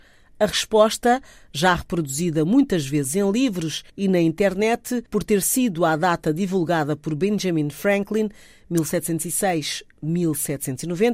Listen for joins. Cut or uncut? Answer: cut